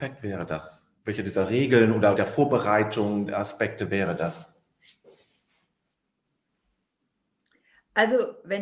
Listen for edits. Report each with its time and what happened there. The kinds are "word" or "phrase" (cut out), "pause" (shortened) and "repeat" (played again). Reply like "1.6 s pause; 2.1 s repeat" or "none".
1.0 s pause; 2.2 s word